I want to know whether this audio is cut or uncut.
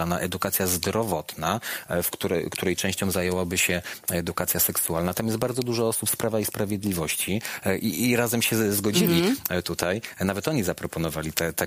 uncut